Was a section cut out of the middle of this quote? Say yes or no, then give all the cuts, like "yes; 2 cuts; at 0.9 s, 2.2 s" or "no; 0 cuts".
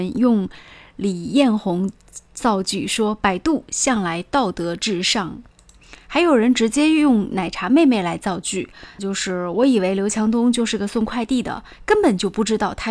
yes; 2 cuts; at 5.5 s, 9.0 s